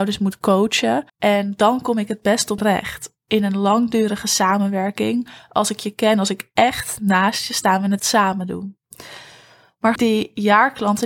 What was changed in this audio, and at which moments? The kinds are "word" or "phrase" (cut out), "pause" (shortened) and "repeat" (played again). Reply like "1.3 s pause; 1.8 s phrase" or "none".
1.1 s pause; 2.6 s word; 8.0 s word; 10.0 s word